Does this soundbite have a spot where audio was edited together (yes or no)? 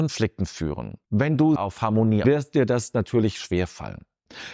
yes